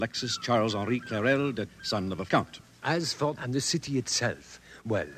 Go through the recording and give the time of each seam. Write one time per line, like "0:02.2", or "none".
0:01.7
0:02.3
0:03.3